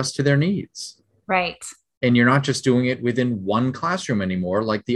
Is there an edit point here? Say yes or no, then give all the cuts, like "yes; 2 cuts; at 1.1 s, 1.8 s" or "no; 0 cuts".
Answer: no; 0 cuts